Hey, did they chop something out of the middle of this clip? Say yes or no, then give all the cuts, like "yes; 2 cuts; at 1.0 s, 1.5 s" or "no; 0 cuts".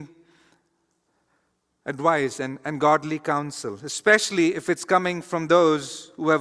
no; 0 cuts